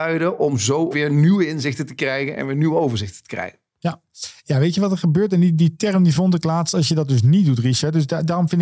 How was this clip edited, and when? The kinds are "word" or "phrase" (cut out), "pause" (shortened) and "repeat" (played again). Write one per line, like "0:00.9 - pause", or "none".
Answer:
0:00.9 - word